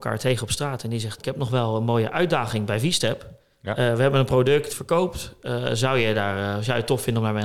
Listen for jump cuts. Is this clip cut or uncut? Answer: cut